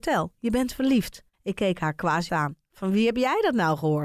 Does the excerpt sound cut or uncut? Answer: cut